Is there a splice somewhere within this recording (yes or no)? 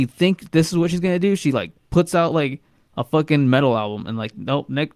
no